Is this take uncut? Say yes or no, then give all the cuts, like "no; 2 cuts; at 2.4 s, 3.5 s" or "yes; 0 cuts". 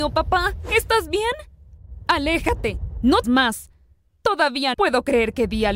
no; 2 cuts; at 3.2 s, 4.7 s